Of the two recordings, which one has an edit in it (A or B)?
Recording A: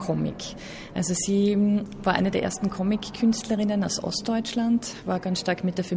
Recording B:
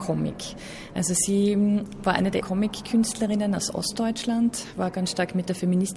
B